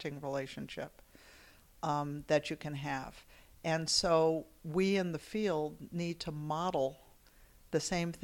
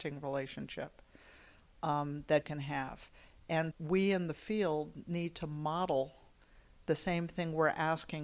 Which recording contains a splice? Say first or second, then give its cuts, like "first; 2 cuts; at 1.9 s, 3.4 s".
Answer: second; 2 cuts; at 2.4 s, 3.7 s